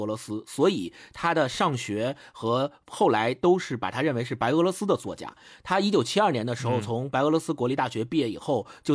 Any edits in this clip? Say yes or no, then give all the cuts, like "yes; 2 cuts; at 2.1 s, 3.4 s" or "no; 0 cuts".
no; 0 cuts